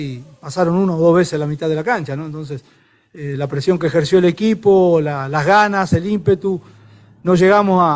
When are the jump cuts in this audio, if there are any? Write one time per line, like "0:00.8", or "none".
none

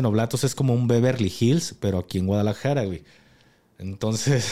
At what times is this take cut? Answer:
none

